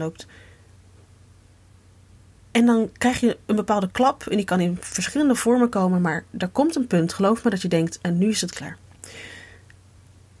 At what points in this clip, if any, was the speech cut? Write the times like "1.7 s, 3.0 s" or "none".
none

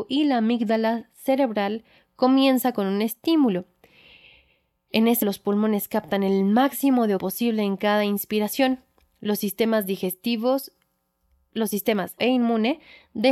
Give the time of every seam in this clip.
5.2 s, 7.2 s, 12.2 s

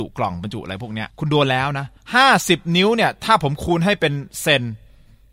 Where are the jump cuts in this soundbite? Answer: 1.1 s, 2.0 s

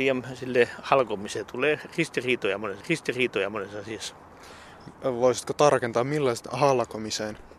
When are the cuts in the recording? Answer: 2.8 s

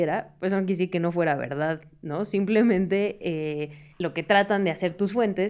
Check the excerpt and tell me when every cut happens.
3.9 s

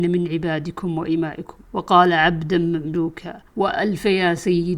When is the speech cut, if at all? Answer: 1.6 s, 3.5 s

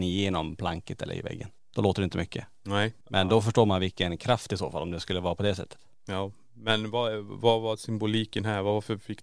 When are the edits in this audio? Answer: 3.0 s

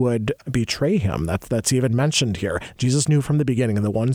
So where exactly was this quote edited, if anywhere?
none

